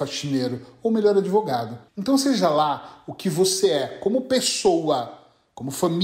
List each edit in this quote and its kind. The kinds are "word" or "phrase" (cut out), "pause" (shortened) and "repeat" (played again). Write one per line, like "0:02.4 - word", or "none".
0:01.9 - pause